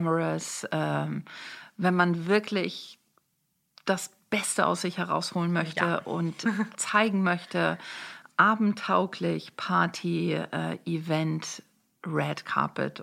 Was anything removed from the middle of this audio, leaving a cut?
no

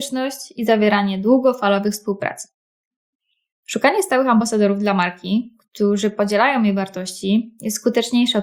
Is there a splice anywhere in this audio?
no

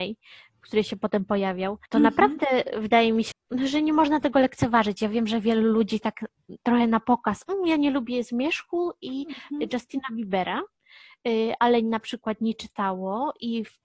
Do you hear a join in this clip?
yes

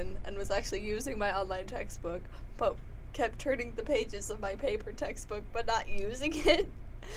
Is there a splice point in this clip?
no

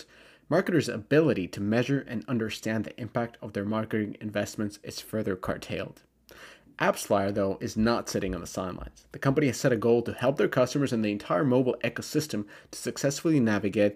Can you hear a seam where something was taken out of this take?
no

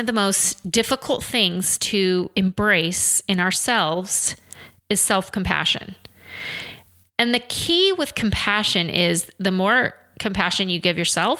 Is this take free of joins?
yes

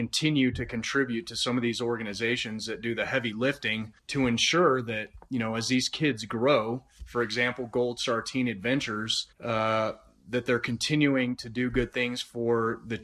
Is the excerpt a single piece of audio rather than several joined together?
no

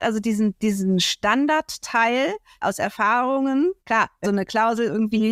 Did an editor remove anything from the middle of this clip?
yes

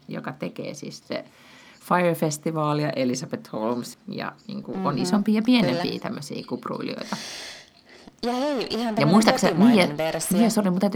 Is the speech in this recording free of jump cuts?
no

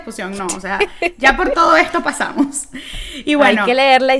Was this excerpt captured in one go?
yes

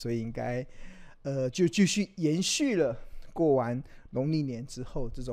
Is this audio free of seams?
yes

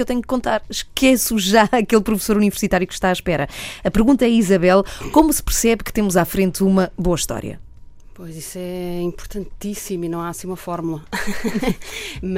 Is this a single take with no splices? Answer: yes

